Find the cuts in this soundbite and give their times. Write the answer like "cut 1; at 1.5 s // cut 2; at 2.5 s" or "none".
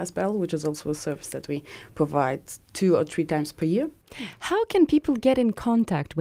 none

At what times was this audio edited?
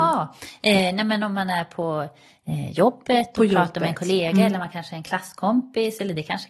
none

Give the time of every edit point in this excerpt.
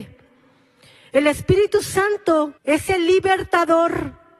cut 1; at 2.6 s

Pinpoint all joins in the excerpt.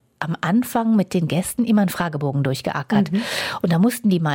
none

